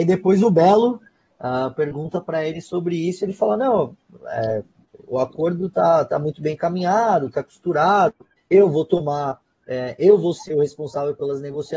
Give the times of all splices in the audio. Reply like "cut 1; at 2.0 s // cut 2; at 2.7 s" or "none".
none